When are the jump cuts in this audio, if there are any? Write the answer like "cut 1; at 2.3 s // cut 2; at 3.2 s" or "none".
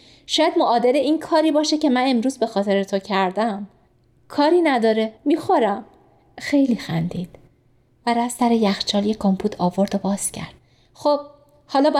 cut 1; at 5.2 s